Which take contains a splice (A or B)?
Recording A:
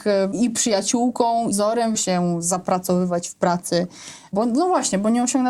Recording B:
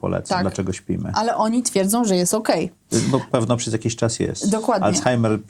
A